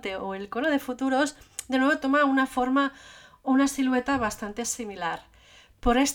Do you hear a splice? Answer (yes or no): no